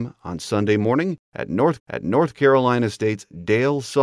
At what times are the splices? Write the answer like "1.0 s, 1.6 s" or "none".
1.8 s